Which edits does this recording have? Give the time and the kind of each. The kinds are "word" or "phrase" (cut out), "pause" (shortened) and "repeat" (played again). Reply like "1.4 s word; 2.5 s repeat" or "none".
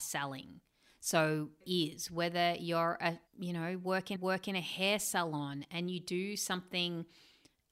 1.6 s phrase; 3.3 s pause; 4.2 s repeat